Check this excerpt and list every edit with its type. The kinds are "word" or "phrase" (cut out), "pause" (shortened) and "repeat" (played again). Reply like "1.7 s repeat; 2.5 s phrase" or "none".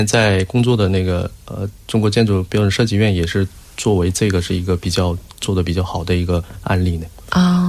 none

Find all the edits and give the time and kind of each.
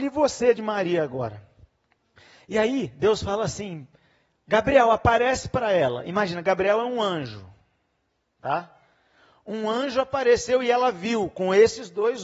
none

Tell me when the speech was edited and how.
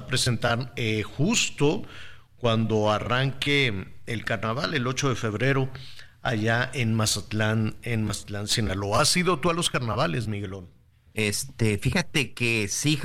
10.9 s pause

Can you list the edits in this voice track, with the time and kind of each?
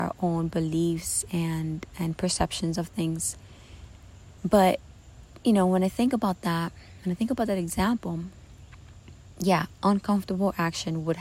4.4 s pause

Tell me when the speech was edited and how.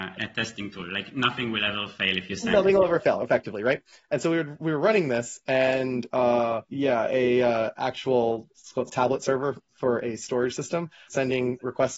6.7 s pause; 8.9 s word; 11.1 s word

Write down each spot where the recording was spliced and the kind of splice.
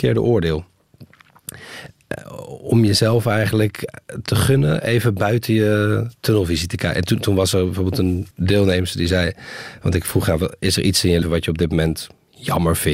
8.3 s pause; 11.2 s word

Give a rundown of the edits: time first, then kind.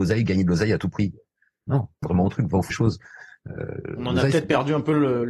2.0 s phrase; 2.7 s word

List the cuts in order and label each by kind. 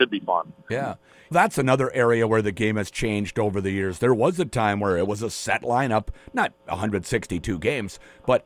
1.3 s word

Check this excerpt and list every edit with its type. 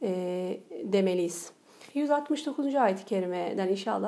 1.9 s pause

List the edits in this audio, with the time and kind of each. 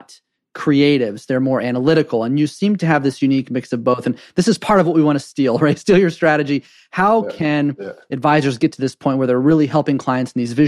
none

